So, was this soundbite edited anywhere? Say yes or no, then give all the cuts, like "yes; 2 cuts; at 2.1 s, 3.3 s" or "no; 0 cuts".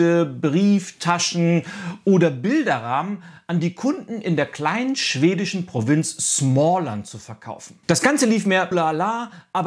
yes; 2 cuts; at 7.8 s, 8.7 s